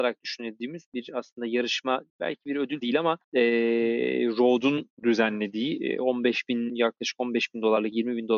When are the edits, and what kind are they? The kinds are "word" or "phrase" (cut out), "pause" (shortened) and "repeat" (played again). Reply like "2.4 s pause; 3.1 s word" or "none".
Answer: 2.1 s pause; 2.8 s word; 3.2 s pause; 4.9 s pause